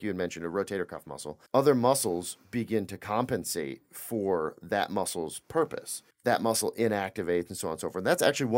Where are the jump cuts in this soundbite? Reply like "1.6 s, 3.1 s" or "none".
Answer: 1.5 s, 6.1 s